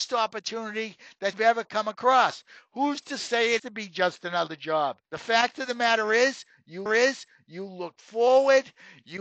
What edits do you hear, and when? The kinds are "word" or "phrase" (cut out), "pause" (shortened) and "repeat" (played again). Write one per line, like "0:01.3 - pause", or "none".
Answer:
0:01.3 - word
0:03.6 - word
0:05.0 - pause
0:06.9 - repeat